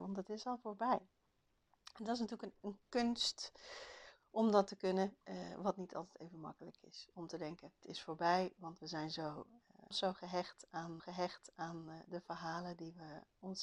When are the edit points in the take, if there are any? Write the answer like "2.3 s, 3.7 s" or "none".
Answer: 2.5 s, 5.2 s, 7.8 s, 9.9 s, 11.0 s